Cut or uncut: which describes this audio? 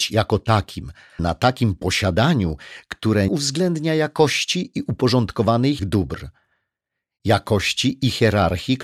cut